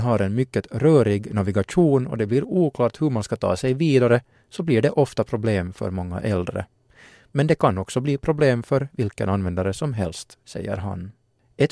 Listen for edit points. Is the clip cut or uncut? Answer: uncut